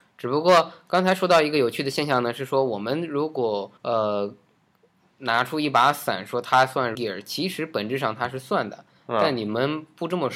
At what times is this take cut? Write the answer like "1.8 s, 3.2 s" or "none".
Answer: 3.8 s, 6.9 s